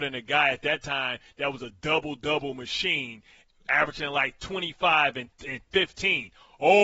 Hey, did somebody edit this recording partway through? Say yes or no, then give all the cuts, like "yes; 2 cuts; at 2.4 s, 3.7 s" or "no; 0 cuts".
no; 0 cuts